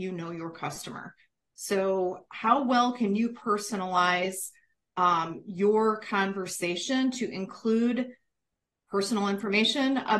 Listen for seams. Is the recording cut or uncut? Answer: uncut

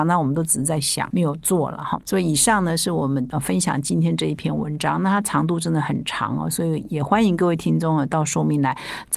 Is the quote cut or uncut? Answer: cut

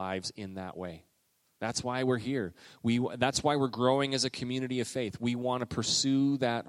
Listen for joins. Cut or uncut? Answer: uncut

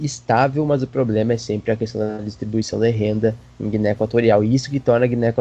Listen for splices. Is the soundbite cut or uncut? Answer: uncut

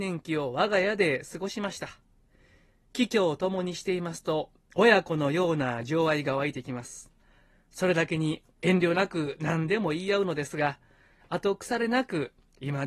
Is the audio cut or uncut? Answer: uncut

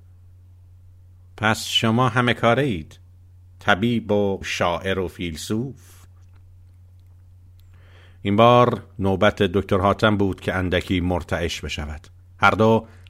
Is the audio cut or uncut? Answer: cut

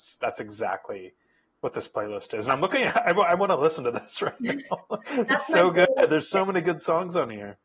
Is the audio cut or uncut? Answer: uncut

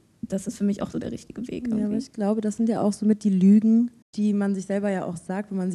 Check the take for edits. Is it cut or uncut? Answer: cut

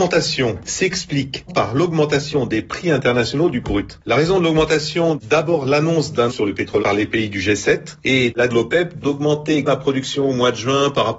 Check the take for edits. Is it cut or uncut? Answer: cut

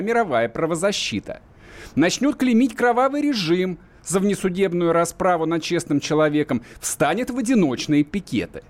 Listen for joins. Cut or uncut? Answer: uncut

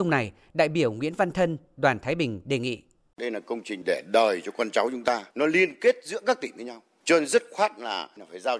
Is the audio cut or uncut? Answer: cut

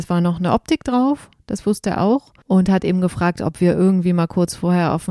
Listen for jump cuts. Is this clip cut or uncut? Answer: cut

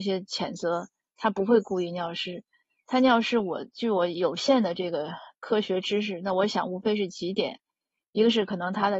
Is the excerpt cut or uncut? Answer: uncut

